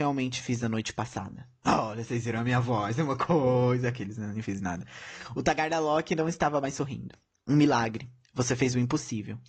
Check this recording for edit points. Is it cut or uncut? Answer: uncut